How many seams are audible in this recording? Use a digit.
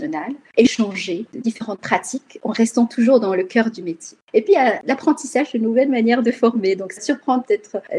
1